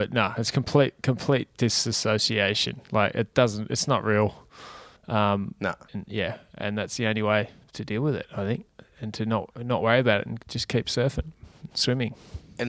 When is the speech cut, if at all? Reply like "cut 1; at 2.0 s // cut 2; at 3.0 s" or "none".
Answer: cut 1; at 5.0 s // cut 2; at 5.9 s // cut 3; at 7.6 s